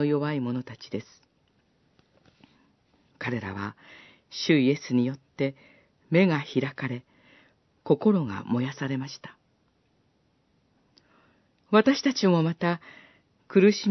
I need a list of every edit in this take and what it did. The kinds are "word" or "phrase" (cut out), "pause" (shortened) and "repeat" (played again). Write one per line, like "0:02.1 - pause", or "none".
none